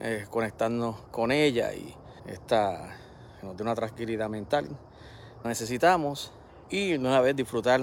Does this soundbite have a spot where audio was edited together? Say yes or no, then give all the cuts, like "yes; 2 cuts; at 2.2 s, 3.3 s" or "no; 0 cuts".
yes; 4 cuts; at 1.1 s, 2.2 s, 5.4 s, 6.6 s